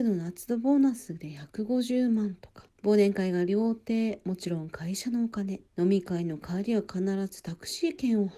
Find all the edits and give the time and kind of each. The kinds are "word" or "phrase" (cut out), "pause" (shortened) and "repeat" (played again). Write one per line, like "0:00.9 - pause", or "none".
0:02.7 - pause
0:05.7 - pause